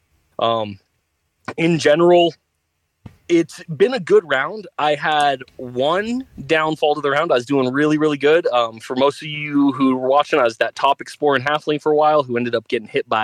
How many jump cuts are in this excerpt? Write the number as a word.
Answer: zero